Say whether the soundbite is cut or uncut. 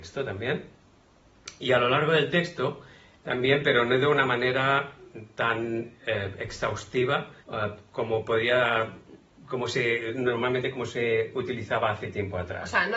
cut